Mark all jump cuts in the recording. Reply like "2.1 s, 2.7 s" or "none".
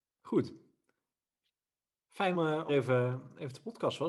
2.3 s, 2.7 s